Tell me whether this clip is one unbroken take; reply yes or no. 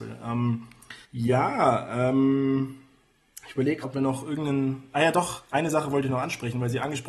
no